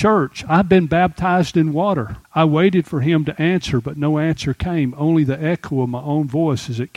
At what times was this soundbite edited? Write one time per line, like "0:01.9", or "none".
0:02.2